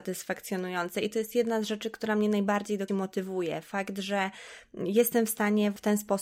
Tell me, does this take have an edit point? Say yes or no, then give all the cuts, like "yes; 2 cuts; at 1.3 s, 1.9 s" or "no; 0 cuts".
yes; 1 cut; at 2.9 s